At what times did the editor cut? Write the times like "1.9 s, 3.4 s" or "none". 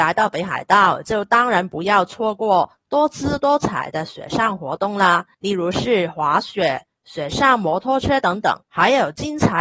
5.3 s, 8.6 s

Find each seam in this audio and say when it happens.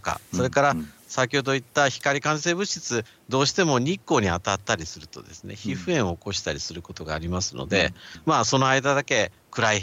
none

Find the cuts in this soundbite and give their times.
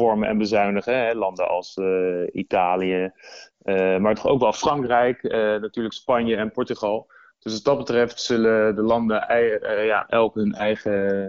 none

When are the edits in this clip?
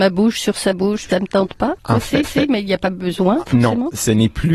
1.1 s, 1.8 s, 2.2 s

